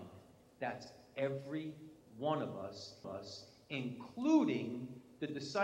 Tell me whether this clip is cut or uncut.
cut